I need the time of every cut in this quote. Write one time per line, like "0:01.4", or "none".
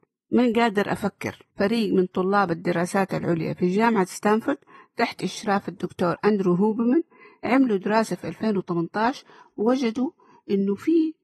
0:01.5